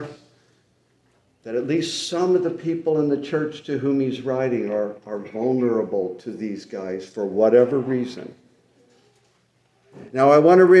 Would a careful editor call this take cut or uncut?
uncut